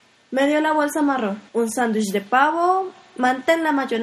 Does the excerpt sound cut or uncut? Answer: cut